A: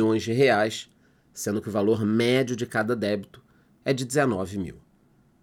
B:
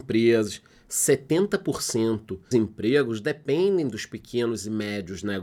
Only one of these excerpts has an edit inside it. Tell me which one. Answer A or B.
B